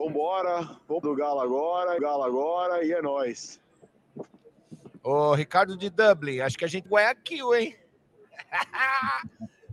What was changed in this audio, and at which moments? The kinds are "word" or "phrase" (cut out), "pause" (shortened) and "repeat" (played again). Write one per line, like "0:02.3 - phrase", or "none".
0:01.0 - phrase
0:02.0 - repeat
0:06.9 - phrase